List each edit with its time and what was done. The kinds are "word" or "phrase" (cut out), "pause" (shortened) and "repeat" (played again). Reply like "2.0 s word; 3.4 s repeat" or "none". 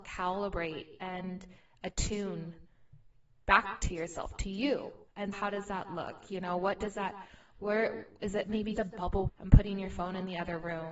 5.3 s word; 8.7 s word; 9.3 s word